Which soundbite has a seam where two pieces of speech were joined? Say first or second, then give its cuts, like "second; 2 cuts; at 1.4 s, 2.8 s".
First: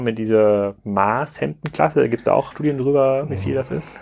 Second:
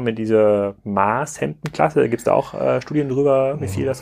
first; 1 cut; at 2.5 s